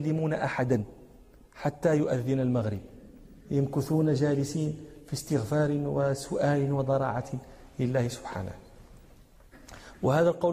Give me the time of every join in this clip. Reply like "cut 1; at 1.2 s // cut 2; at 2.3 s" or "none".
cut 1; at 3.4 s